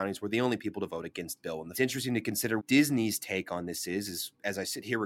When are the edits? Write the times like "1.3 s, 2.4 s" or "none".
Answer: 1.4 s, 1.7 s, 2.6 s